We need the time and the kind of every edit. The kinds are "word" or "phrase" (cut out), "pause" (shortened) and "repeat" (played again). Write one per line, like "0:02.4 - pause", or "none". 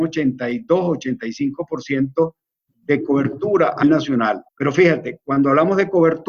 0:02.7 - word
0:03.8 - word
0:04.5 - pause